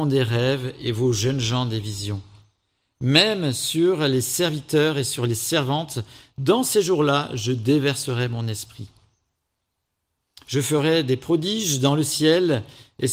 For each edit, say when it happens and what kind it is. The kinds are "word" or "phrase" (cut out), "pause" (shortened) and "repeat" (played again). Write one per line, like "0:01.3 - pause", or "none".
none

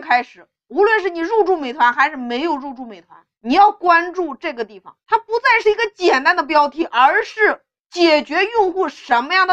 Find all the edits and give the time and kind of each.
0:03.3 - pause
0:05.0 - pause

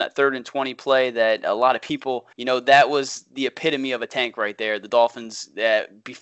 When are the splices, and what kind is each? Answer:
0:02.3 - pause

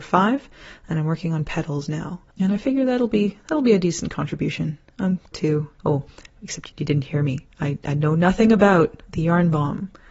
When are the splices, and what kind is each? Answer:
0:02.3 - pause
0:05.3 - phrase
0:05.7 - pause
0:06.7 - word

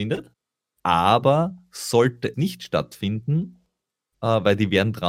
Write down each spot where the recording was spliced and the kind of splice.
0:02.3 - word

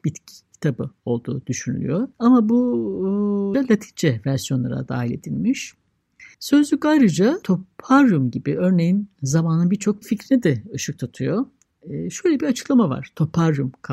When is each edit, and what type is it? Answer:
0:02.1 - pause
0:03.5 - phrase
0:06.3 - pause
0:07.4 - word
0:10.0 - word

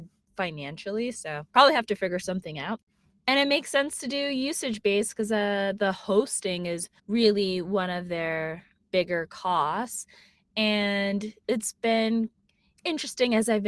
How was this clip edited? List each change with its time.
0:01.5 - pause
0:07.0 - pause

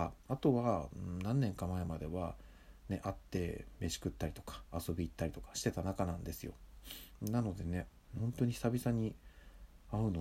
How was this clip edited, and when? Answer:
0:08.2 - phrase

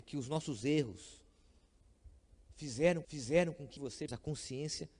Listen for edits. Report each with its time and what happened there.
0:03.0 - repeat
0:03.8 - phrase
0:04.1 - word

